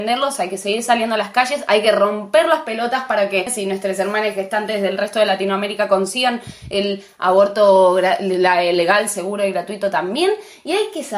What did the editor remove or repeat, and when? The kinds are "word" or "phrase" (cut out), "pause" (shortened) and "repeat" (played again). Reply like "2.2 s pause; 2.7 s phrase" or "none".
none